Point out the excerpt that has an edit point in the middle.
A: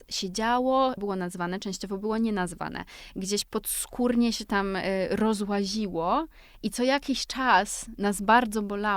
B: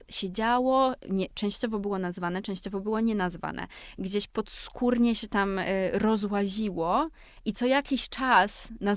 A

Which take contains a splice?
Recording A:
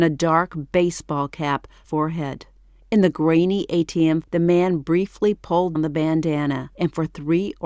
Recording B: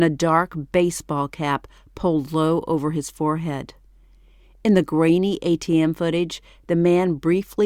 A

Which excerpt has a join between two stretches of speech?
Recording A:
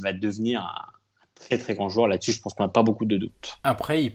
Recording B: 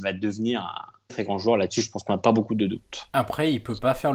B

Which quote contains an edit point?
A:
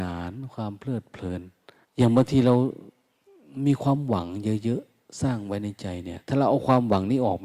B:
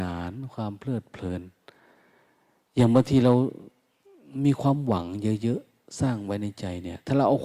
A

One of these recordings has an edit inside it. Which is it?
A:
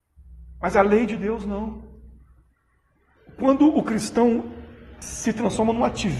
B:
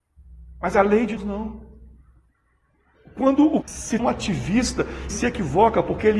B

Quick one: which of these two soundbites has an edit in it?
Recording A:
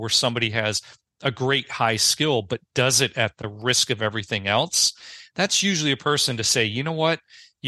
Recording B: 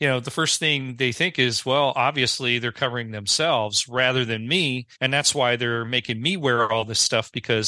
B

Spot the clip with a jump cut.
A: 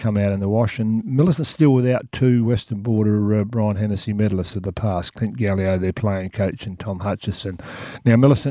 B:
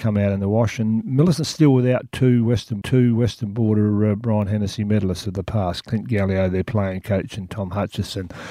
B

